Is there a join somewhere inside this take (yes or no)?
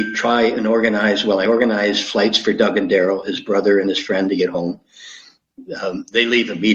no